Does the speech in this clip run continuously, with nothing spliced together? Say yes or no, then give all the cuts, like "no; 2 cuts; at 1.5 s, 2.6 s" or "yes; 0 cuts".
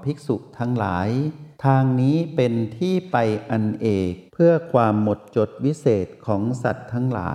no; 2 cuts; at 1.5 s, 4.3 s